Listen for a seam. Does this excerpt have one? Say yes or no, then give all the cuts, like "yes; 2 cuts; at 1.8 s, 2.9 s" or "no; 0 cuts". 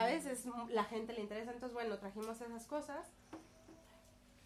no; 0 cuts